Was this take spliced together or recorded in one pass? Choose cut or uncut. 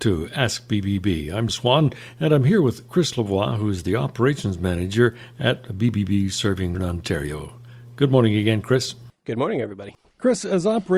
cut